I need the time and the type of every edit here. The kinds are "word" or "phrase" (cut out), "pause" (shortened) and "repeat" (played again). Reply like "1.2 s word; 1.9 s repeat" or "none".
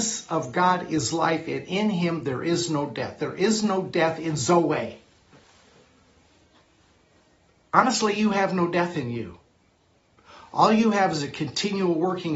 none